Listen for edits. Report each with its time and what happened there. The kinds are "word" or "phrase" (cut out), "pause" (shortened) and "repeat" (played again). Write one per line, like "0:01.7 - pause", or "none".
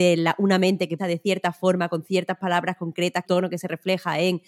0:01.0 - word
0:03.2 - phrase